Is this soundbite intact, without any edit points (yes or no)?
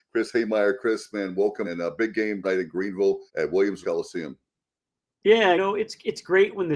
no